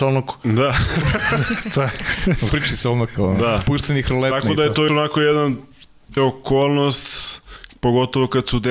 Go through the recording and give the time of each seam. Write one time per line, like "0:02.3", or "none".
0:02.5
0:04.9
0:06.2